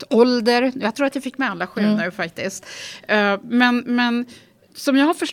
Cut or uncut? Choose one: uncut